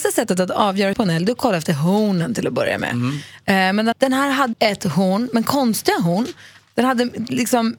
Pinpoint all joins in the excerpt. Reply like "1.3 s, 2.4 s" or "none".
0.9 s, 3.9 s, 4.5 s